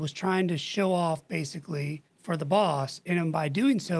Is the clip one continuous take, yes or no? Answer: no